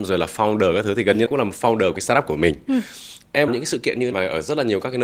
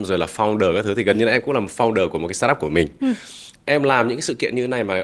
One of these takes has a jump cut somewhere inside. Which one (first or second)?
first